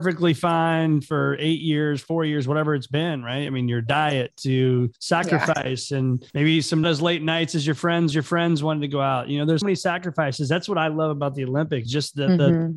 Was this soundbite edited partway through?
yes; 6 cuts; at 5.0 s, 6.3 s, 6.8 s, 8.1 s, 9.6 s, 11.9 s

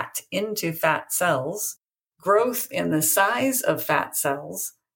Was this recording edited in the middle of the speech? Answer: no; 0 cuts

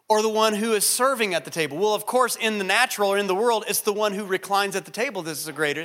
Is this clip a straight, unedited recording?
yes; 0 cuts

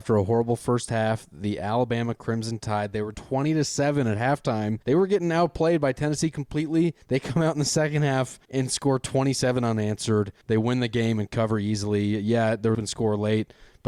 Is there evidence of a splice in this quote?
yes; 6 cuts; at 3.1 s, 4.8 s, 7.0 s, 8.4 s, 10.4 s, 12.7 s

